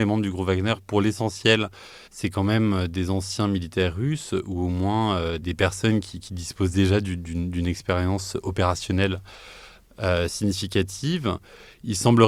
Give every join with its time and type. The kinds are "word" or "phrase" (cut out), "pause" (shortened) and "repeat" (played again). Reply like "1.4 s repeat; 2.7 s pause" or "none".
2.0 s pause